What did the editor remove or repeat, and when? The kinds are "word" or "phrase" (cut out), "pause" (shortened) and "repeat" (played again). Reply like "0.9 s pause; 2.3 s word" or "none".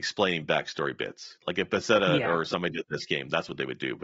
none